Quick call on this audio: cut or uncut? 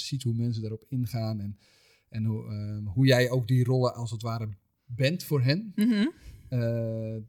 uncut